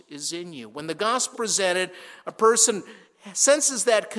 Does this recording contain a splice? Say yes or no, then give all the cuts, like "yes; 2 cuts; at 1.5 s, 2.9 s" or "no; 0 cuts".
yes; 1 cut; at 1.3 s